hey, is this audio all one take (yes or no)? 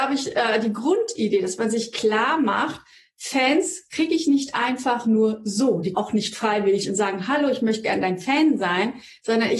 no